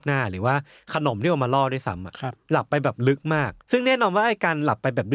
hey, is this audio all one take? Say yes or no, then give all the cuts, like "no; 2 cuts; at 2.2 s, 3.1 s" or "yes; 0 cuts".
no; 1 cut; at 3.6 s